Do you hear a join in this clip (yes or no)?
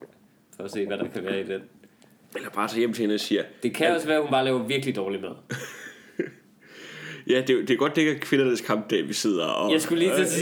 no